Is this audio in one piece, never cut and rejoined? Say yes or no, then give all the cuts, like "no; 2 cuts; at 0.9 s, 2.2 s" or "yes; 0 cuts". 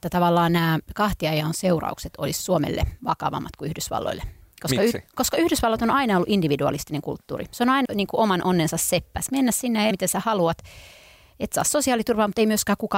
no; 3 cuts; at 7.8 s, 9.3 s, 9.9 s